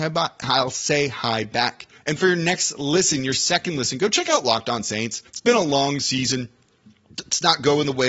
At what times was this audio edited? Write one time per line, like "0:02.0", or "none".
0:02.0
0:05.3